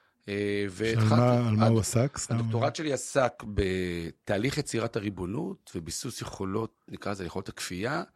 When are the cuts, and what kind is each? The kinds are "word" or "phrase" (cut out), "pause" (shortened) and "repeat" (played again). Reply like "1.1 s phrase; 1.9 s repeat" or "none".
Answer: none